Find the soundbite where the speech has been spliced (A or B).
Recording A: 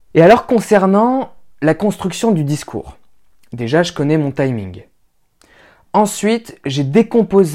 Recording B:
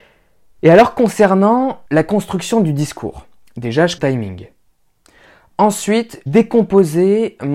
B